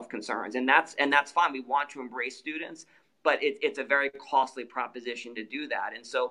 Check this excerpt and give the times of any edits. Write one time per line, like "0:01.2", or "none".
none